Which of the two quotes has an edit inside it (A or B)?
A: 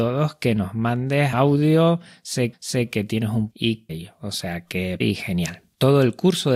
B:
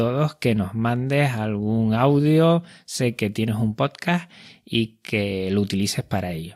A